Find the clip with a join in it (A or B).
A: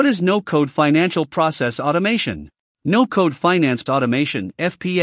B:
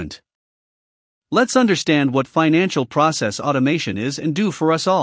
A